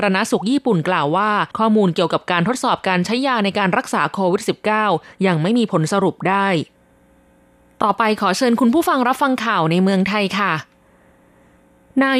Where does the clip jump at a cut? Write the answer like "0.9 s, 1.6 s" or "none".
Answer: 1.5 s